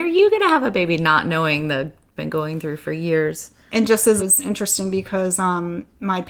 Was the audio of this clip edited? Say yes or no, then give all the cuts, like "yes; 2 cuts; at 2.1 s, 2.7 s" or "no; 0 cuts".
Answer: yes; 2 cuts; at 2.2 s, 4.2 s